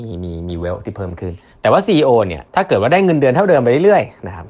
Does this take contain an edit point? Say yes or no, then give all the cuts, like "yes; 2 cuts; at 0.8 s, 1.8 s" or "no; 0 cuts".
yes; 2 cuts; at 1.5 s, 2.5 s